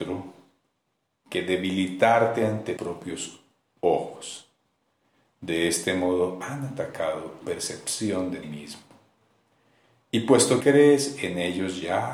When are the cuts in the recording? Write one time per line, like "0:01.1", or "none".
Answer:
0:02.8
0:07.4
0:08.4
0:10.6